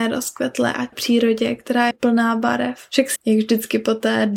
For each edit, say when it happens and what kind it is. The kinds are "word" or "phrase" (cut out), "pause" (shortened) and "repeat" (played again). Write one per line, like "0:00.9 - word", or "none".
0:00.9 - word
0:01.9 - phrase
0:03.2 - word